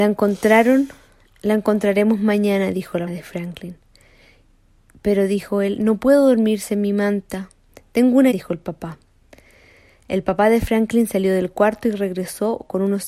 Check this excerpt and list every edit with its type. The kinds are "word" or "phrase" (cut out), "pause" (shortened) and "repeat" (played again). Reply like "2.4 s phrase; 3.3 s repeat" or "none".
3.1 s word; 8.3 s word